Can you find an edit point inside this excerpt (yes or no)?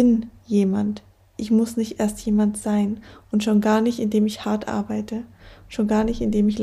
no